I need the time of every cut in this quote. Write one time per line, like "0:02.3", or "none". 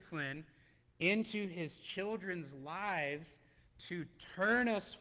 none